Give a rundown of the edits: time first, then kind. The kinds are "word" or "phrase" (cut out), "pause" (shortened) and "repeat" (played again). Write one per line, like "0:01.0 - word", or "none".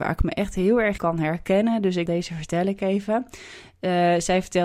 0:01.0 - word
0:02.1 - word